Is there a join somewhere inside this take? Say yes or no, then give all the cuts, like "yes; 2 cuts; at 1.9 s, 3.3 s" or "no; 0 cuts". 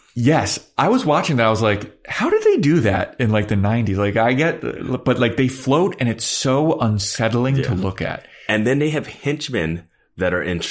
no; 0 cuts